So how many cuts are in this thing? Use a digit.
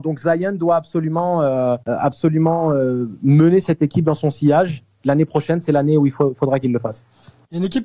1